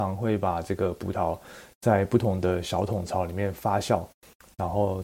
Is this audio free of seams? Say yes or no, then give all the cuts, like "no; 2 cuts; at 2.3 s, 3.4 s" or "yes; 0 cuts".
yes; 0 cuts